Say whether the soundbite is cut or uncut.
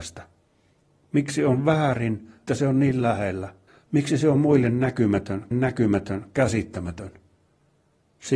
cut